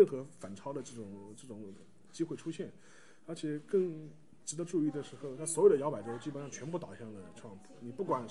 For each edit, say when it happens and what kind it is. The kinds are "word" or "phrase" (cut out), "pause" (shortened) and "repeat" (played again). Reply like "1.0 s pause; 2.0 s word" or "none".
none

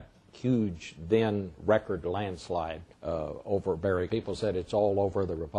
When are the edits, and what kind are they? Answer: 2.9 s pause; 4.1 s phrase

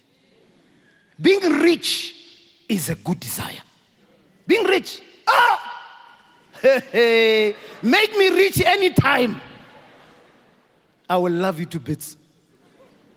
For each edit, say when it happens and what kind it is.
none

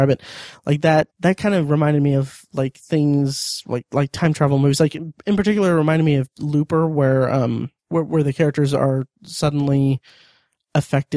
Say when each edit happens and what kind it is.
1.1 s pause; 7.8 s pause

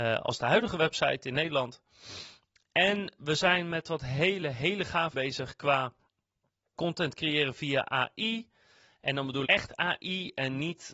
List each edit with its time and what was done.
4.4 s word; 5.1 s word; 6.7 s word; 9.4 s word

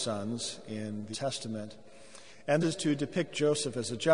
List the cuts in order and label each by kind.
1.1 s word; 2.6 s word

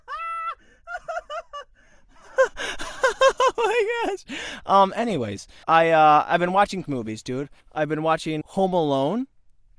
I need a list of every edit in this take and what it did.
5.6 s pause; 6.9 s word; 7.6 s pause; 8.4 s word

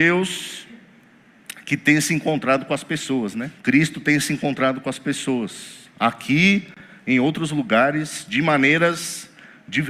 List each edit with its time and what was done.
3.6 s pause

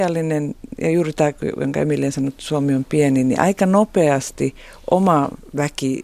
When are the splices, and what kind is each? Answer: none

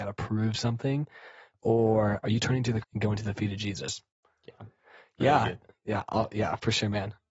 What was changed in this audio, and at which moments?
2.2 s word; 2.8 s word

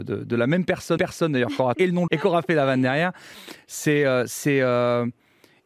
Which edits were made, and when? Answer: 1.0 s repeat; 1.7 s word; 2.1 s word

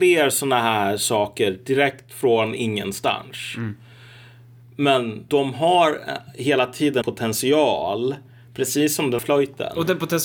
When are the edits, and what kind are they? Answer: 5.3 s word; 7.0 s word; 9.2 s word

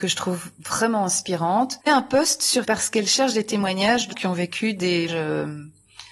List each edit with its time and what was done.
1.9 s word; 2.6 s word; 4.1 s word; 5.1 s word

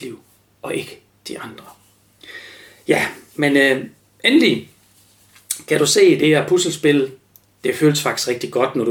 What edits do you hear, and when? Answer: none

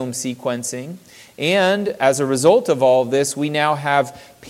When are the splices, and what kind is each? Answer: none

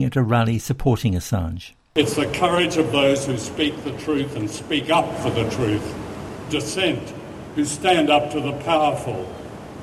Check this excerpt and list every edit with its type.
6.5 s word

